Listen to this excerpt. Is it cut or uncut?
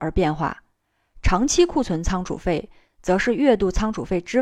uncut